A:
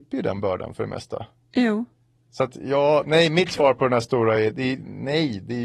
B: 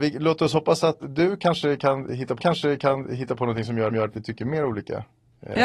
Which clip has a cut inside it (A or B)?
B